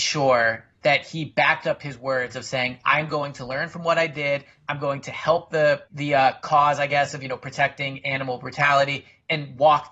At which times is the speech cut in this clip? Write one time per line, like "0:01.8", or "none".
0:05.9